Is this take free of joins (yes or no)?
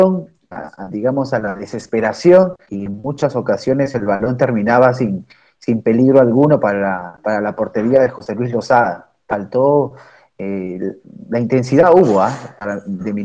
no